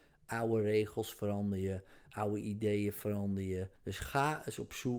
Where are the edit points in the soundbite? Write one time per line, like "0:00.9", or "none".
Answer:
0:03.8